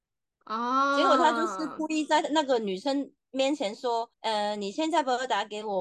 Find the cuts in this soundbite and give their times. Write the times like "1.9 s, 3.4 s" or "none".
4.1 s